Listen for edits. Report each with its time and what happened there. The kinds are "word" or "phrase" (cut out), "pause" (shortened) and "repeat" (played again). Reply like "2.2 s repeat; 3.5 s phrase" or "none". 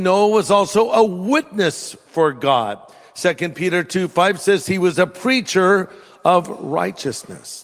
none